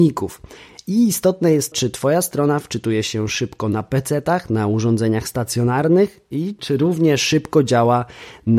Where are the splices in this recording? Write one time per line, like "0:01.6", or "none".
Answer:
0:01.7